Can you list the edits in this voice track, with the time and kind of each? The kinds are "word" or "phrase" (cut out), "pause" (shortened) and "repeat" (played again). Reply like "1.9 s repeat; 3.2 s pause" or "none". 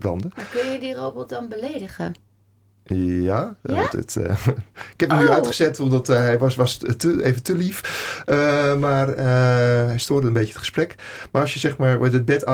none